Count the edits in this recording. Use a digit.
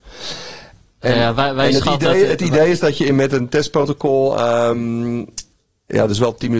0